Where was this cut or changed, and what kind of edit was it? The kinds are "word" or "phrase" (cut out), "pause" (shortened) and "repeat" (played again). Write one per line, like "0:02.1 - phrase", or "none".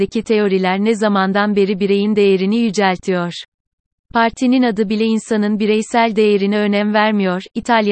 none